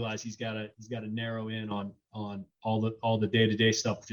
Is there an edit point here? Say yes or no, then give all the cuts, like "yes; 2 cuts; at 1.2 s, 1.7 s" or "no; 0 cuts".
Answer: no; 0 cuts